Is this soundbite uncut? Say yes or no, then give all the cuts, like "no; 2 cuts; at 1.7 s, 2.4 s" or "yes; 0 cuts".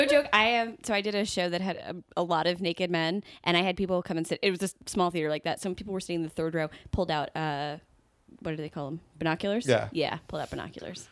yes; 0 cuts